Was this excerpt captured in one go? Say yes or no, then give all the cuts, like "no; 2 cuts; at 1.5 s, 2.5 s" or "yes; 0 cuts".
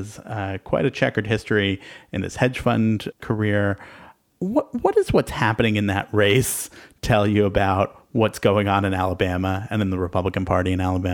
yes; 0 cuts